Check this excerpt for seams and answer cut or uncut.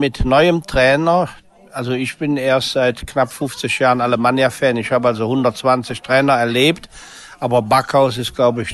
uncut